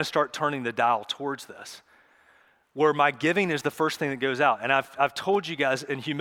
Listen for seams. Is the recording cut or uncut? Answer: uncut